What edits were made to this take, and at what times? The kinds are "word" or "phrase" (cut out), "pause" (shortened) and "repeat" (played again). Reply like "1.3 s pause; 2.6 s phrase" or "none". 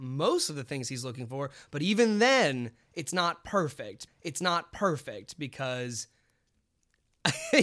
4.1 s repeat